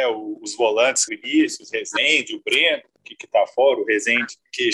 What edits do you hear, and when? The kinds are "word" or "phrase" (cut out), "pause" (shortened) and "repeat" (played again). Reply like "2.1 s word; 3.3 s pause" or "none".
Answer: 1.1 s word